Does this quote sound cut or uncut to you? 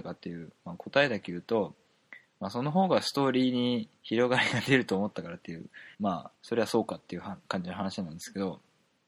cut